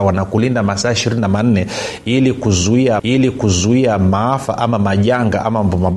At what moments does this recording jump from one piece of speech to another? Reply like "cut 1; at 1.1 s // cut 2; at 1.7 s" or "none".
cut 1; at 3.0 s